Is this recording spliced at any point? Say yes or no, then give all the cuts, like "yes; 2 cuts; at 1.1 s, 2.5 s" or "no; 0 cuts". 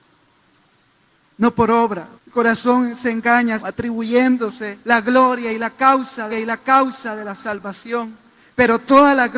yes; 4 cuts; at 2.2 s, 3.6 s, 4.8 s, 6.3 s